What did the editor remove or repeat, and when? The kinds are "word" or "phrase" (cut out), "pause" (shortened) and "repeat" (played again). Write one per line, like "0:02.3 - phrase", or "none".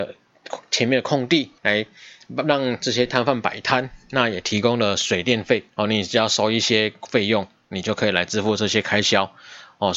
0:01.6 - pause
0:05.7 - pause

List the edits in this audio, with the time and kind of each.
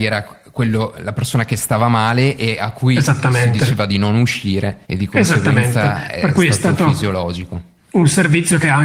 0:04.8 - pause

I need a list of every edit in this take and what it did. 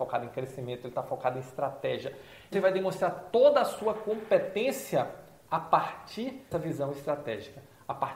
0:02.5 - phrase
0:06.5 - word

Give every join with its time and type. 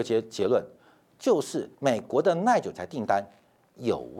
0:01.7 - pause

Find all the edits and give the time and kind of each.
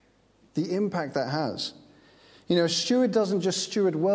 none

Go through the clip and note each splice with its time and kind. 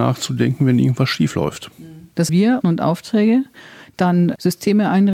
0:02.3 - phrase
0:02.6 - phrase

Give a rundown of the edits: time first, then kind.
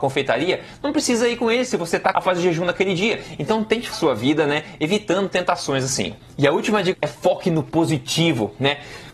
0:02.1 - word
0:03.9 - word
0:06.9 - word

